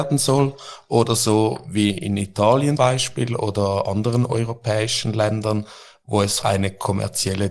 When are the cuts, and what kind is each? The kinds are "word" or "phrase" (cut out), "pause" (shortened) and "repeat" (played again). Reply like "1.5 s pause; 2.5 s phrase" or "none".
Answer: 2.8 s word; 6.4 s word